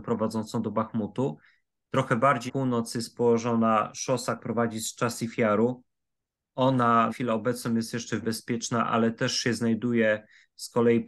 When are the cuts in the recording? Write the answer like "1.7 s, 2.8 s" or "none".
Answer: 2.5 s, 4.4 s, 7.1 s, 8.2 s